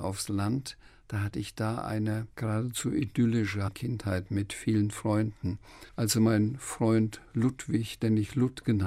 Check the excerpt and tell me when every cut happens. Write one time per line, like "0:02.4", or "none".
0:02.3
0:03.7
0:05.9